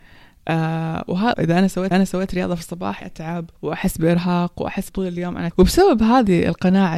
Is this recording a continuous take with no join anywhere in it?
no; 6 cuts; at 1.3 s, 1.9 s, 3.0 s, 3.6 s, 4.9 s, 5.5 s

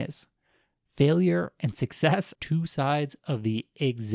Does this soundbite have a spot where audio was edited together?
yes; 1 cut; at 2.3 s

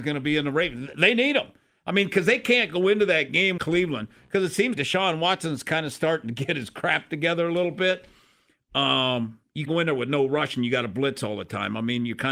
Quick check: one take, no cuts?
no; 3 cuts; at 3.6 s, 4.7 s, 9.7 s

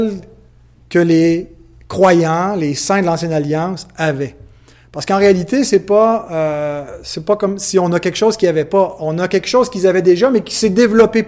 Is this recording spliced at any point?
no; 0 cuts

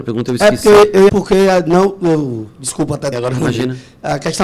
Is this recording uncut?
no; 2 cuts; at 1.1 s, 3.1 s

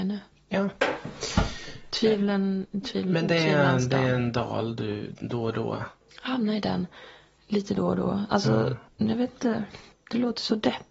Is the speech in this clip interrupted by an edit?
no; 0 cuts

